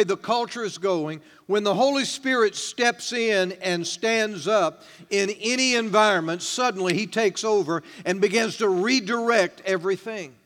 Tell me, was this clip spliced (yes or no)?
no